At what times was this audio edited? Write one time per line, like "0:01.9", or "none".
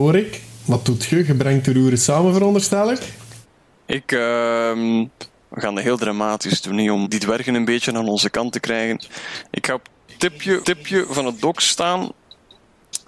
0:07.0
0:10.6